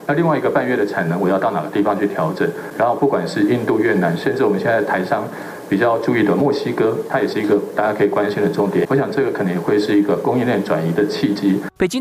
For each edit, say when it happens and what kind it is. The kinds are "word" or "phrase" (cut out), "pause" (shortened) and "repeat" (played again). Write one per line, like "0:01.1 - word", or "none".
none